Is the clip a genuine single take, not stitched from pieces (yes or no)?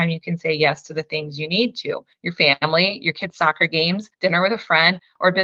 no